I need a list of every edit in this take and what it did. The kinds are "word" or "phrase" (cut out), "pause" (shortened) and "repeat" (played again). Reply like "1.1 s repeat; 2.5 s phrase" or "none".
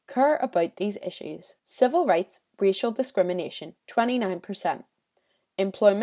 3.8 s pause

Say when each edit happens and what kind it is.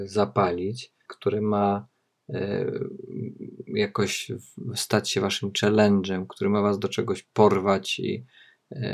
1.0 s pause

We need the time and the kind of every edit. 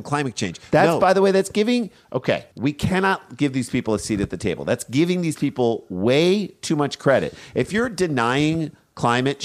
2.5 s pause

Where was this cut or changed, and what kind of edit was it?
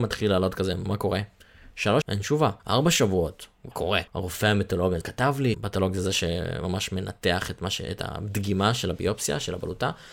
2.0 s word; 2.6 s pause; 3.7 s phrase; 4.1 s pause; 5.0 s word; 5.5 s word

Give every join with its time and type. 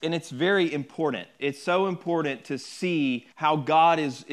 3.3 s pause

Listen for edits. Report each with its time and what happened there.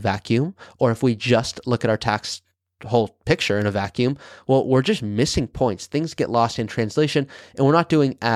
none

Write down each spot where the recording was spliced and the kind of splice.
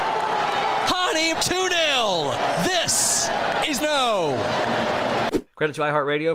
1.3 s word; 3.8 s phrase

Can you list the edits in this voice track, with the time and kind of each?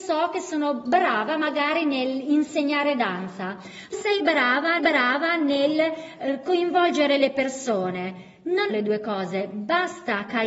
3.9 s word; 4.8 s repeat; 8.7 s word

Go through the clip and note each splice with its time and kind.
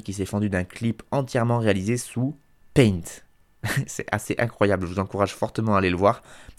none

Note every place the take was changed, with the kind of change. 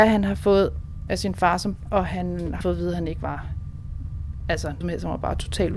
1.1 s word; 1.9 s word; 2.6 s word; 4.8 s word

